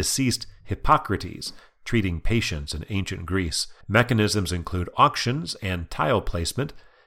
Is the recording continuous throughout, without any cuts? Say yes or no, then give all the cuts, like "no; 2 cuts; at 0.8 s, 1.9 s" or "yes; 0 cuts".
no; 1 cut; at 3.8 s